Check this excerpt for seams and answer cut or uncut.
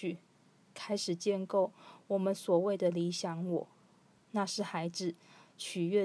uncut